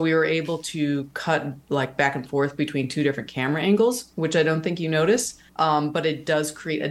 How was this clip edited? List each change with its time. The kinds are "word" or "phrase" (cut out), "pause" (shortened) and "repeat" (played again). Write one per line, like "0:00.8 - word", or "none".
0:01.6 - pause
0:05.5 - pause